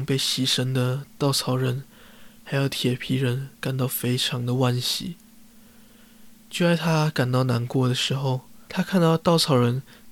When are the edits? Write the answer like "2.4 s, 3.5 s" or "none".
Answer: 3.5 s, 8.7 s